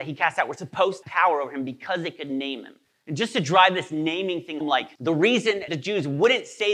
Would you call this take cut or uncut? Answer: cut